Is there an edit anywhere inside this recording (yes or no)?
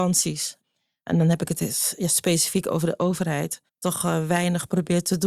yes